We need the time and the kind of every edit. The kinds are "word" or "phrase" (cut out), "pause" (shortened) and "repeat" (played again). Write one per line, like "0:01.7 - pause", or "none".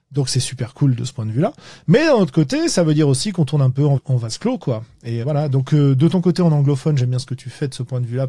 0:04.0 - word
0:05.2 - word